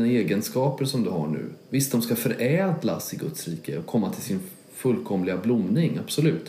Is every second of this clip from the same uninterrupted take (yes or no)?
yes